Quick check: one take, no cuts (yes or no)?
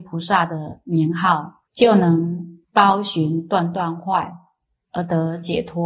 no